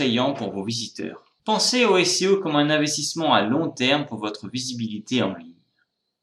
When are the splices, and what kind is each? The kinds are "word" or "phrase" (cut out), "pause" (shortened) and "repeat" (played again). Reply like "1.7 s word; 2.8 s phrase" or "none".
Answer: 1.4 s pause